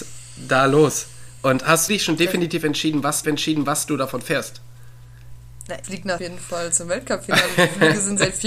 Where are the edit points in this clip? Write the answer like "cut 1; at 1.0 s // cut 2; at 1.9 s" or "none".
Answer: cut 1; at 1.9 s // cut 2; at 3.2 s // cut 3; at 5.8 s // cut 4; at 6.2 s